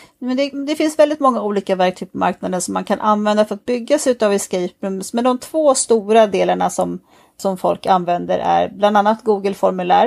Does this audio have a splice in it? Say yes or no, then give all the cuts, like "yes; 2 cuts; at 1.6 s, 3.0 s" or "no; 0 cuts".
no; 0 cuts